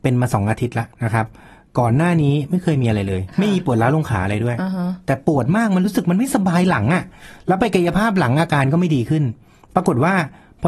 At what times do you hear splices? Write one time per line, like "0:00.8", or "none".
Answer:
0:00.9